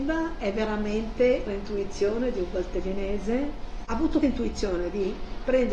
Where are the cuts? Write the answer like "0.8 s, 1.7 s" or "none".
1.5 s, 4.2 s